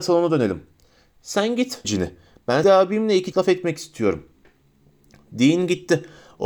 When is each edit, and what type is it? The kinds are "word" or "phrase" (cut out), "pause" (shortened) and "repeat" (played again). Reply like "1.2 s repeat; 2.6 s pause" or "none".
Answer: 1.8 s word; 2.6 s word; 3.3 s word